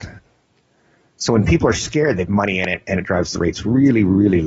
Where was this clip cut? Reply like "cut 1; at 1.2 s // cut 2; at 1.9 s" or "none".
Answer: cut 1; at 2.3 s